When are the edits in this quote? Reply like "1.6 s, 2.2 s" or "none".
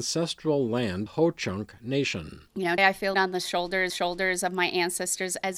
1.1 s, 2.5 s, 2.8 s, 3.1 s, 3.9 s